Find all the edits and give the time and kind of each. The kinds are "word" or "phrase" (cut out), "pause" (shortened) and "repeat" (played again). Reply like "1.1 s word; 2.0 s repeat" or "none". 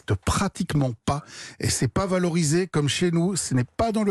none